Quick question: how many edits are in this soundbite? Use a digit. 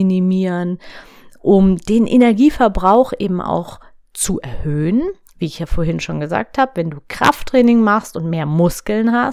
0